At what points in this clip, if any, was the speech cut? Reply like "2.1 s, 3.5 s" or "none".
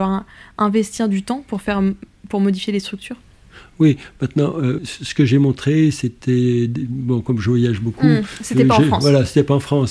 4.8 s